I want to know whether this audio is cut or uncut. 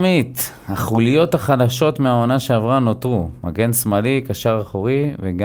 uncut